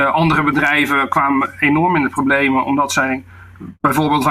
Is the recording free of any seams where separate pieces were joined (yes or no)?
yes